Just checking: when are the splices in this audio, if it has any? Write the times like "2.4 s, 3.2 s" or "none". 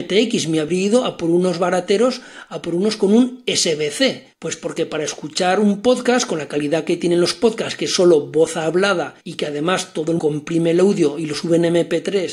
4.3 s, 9.2 s, 10.2 s